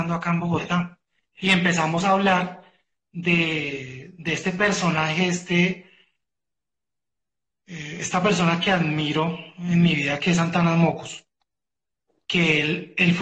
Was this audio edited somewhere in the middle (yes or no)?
no